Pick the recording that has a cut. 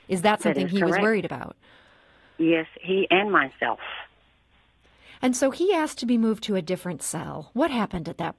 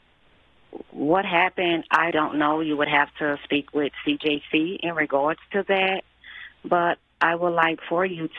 second; 1 cut; at 2.1 s

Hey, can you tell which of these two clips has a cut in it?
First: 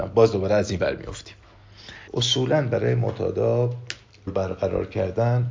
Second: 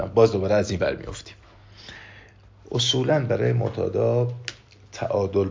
first; 2 cuts; at 2.1 s, 4.3 s

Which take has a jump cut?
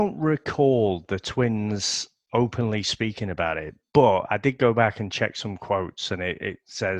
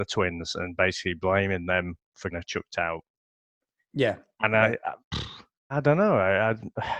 second; 2 cuts; at 2.3 s, 5.7 s

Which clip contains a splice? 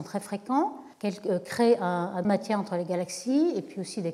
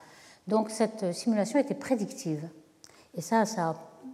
first; 2 cuts; at 0.9 s, 2.2 s

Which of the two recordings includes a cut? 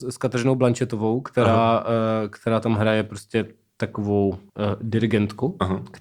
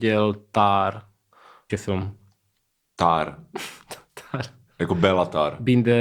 second; 1 cut; at 1.7 s

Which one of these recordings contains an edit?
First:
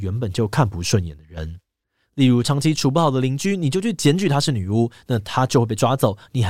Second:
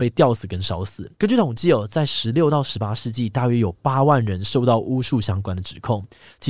second; 1 cut; at 1.1 s

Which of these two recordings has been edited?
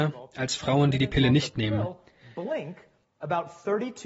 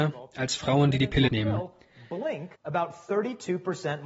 second; 2 cuts; at 1.3 s, 2.5 s

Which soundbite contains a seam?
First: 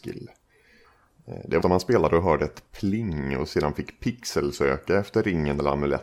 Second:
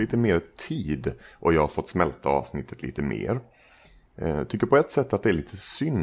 first; 1 cut; at 1.6 s

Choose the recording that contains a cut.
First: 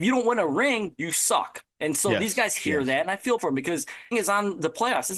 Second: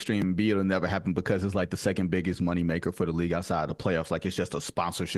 first; 2 cuts; at 3.4 s, 4.1 s

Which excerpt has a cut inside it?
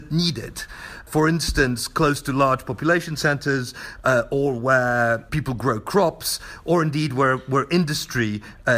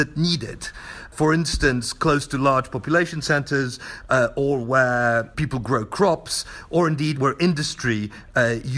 second; 1 cut; at 7.1 s

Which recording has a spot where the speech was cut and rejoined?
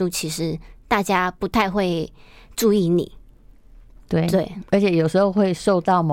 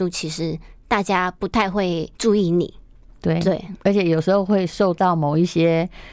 second; 2 cuts; at 2.2 s, 3.0 s

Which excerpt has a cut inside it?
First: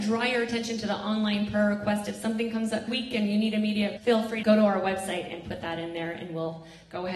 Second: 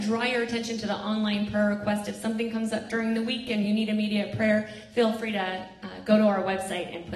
first; 3 cuts; at 2.9 s, 4.0 s, 4.4 s

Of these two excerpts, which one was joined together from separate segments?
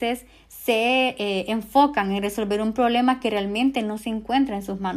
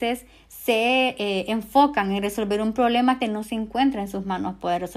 second; 1 cut; at 3.2 s

